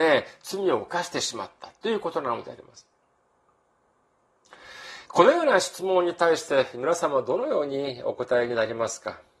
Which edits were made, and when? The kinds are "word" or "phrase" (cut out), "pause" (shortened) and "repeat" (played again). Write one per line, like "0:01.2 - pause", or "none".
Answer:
0:05.1 - pause